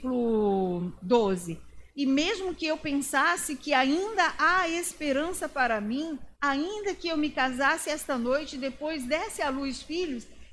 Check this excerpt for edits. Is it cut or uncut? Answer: cut